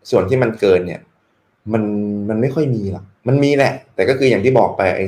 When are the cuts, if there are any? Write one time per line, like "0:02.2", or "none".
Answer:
none